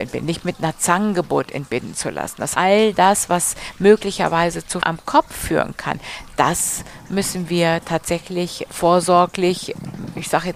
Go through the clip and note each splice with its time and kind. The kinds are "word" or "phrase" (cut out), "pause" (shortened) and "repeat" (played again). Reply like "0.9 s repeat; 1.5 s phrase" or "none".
2.5 s word; 4.8 s word; 8.6 s word